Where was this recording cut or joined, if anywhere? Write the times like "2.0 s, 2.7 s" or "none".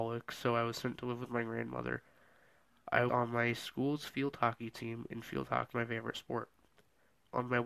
3.1 s, 5.7 s

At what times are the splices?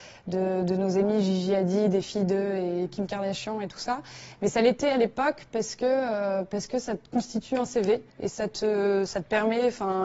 8.1 s

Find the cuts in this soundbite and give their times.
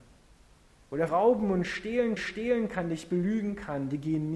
1.1 s, 2.2 s

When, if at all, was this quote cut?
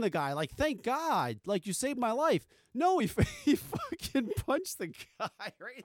none

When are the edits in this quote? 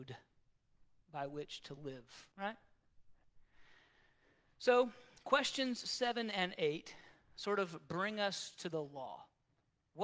2.3 s

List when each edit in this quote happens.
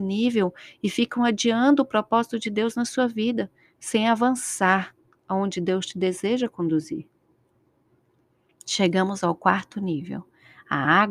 none

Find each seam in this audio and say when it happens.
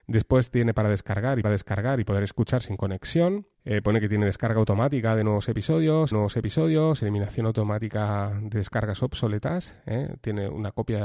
1.4 s, 3.5 s, 6.1 s

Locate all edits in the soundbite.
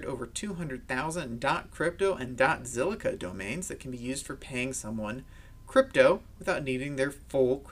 none

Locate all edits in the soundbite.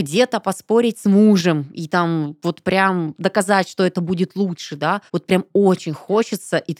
5.1 s

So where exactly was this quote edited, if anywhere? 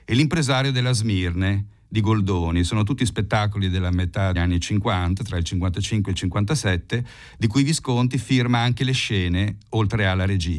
4.4 s

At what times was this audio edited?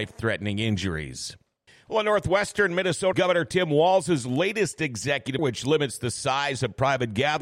1.7 s, 3.1 s, 5.4 s

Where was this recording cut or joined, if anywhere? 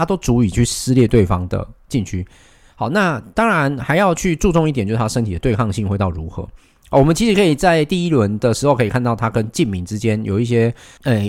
none

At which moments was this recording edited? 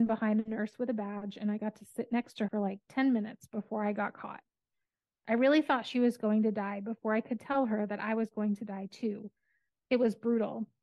2.5 s

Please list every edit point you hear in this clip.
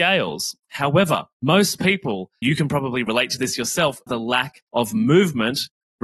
1.3 s, 2.4 s, 4.1 s, 4.7 s

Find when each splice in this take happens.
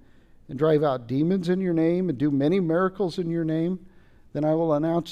none

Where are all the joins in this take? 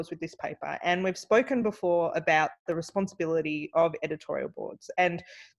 none

